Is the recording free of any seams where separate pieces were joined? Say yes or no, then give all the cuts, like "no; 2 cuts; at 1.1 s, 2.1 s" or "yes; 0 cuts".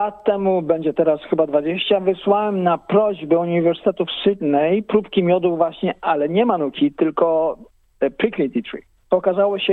yes; 0 cuts